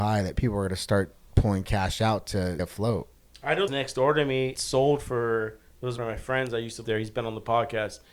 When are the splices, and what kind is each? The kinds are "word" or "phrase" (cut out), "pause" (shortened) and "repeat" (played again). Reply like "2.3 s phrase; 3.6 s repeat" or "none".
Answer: 2.6 s word; 3.7 s phrase; 4.5 s word; 6.0 s word; 6.8 s word